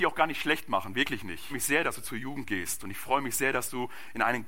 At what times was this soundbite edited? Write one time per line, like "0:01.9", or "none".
0:01.5